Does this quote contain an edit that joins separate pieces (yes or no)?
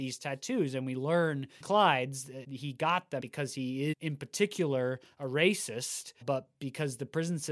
yes